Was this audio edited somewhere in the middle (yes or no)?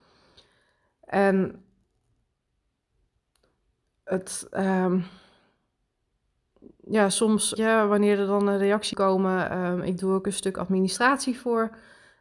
yes